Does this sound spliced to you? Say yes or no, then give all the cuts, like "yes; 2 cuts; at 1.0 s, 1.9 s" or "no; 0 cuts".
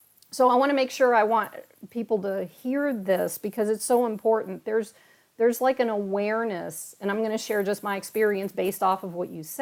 no; 0 cuts